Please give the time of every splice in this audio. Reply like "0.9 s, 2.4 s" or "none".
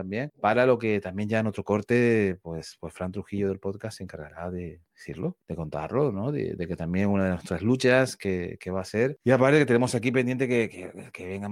4.9 s